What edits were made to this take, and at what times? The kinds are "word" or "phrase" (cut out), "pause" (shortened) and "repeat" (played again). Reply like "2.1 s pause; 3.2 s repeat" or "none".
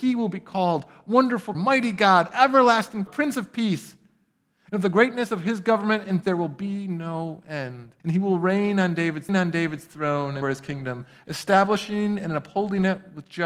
1.5 s word; 3.1 s word; 6.2 s word; 8.0 s pause; 9.3 s repeat; 10.4 s word